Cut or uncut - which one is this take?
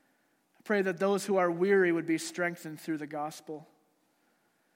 uncut